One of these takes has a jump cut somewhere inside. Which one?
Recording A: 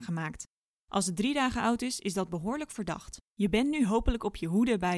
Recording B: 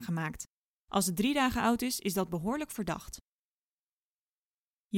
A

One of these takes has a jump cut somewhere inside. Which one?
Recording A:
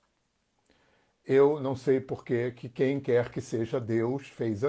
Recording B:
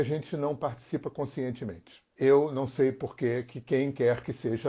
B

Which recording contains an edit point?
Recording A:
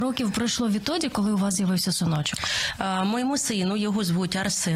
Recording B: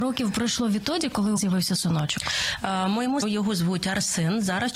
B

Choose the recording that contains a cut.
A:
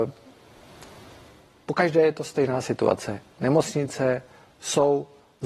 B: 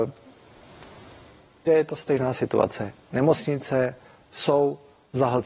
B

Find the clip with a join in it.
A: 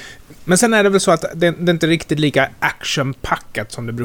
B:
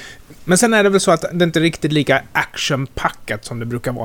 B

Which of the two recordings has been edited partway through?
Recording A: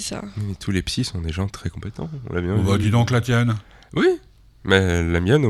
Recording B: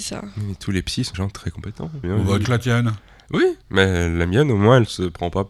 B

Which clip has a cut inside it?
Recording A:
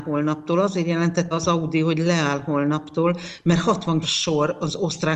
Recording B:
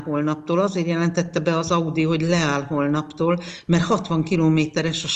A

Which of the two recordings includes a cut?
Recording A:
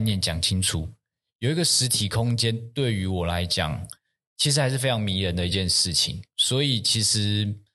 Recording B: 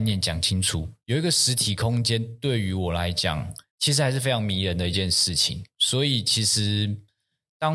B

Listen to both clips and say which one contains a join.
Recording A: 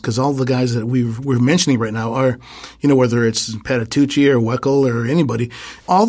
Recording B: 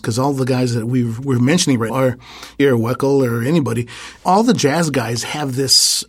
B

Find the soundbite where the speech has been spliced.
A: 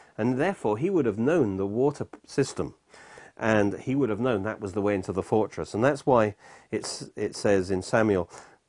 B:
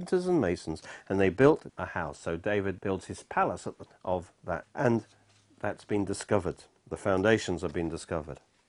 B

